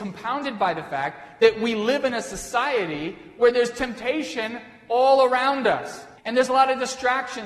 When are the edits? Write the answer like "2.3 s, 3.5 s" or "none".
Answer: 6.2 s